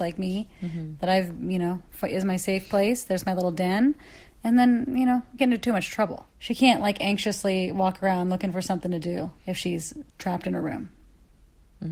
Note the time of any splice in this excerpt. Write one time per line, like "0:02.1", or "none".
0:05.4
0:06.3
0:09.4